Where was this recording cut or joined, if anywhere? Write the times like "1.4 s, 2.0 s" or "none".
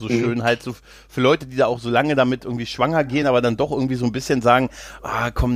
none